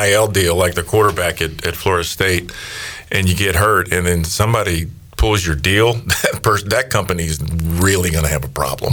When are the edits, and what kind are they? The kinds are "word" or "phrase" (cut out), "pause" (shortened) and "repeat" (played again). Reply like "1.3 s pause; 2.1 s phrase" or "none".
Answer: none